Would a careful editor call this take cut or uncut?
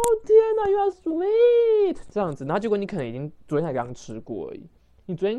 cut